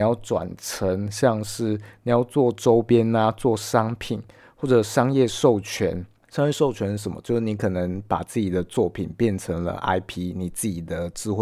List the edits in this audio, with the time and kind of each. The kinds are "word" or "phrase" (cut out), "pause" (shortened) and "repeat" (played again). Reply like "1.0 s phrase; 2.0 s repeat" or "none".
none